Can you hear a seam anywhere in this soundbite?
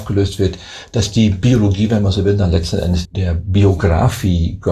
yes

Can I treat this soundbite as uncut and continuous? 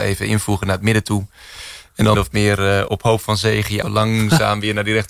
no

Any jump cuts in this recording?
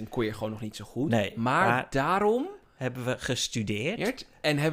no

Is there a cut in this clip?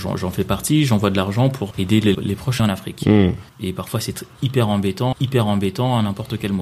yes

